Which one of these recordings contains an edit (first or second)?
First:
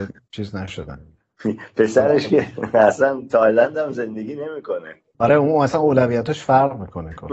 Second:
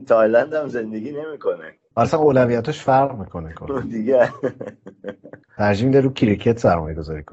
second